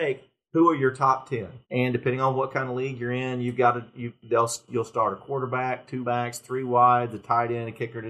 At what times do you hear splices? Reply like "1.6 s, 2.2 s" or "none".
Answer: 1.6 s, 6.0 s